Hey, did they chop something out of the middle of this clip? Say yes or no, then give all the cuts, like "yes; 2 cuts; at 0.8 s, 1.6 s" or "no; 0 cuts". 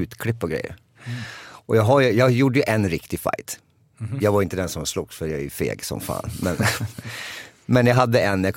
no; 0 cuts